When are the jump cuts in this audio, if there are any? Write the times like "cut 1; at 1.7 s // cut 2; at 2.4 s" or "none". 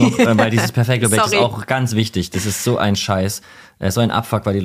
none